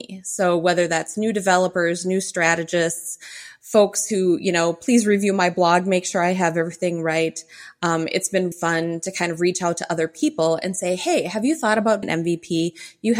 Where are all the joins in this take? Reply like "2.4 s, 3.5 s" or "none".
8.5 s, 12.0 s